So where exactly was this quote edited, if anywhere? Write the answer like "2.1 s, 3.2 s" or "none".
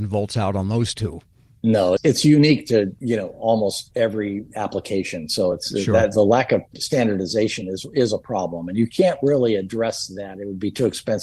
none